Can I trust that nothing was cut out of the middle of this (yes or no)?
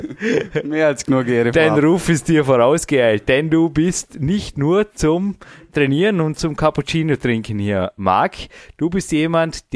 yes